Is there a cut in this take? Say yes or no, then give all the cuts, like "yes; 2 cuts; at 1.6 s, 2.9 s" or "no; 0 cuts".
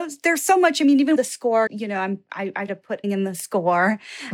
yes; 4 cuts; at 1.2 s, 1.7 s, 2.7 s, 3.0 s